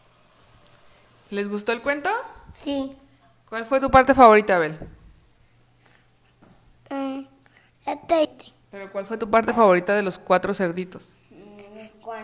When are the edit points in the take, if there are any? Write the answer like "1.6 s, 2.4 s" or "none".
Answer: 8.2 s